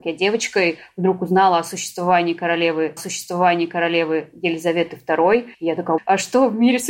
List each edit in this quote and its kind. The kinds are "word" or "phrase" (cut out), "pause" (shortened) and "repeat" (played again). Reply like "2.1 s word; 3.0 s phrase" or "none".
3.0 s repeat; 5.5 s pause; 6.0 s word